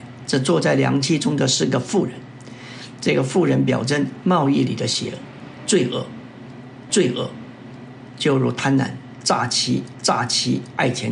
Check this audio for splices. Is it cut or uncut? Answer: cut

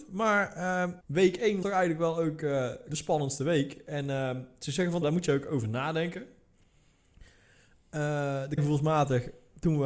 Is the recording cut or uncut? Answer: cut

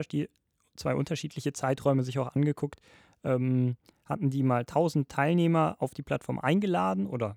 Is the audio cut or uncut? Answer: uncut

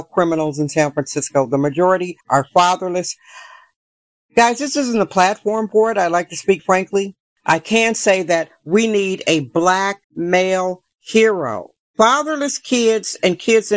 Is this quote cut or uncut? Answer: cut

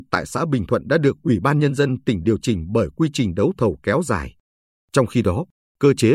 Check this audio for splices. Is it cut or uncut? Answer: uncut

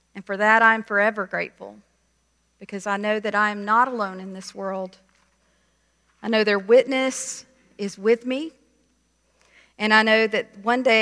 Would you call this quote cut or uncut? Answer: uncut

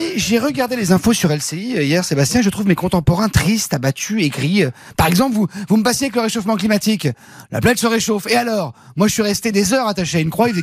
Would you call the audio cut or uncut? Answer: uncut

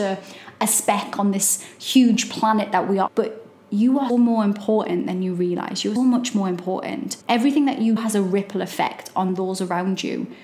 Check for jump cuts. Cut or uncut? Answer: cut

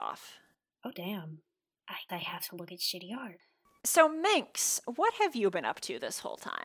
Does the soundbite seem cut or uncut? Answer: cut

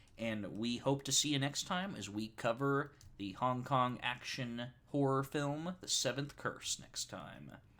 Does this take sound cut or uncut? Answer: uncut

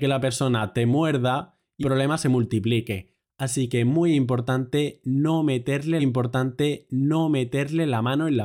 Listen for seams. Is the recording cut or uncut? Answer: cut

